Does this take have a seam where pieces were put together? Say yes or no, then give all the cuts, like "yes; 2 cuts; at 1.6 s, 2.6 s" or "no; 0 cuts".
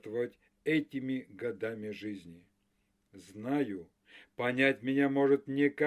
no; 0 cuts